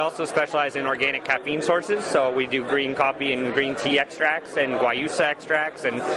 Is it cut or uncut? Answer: uncut